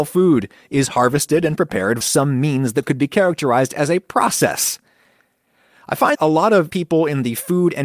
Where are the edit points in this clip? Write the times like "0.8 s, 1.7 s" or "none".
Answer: 2.0 s, 6.1 s, 6.7 s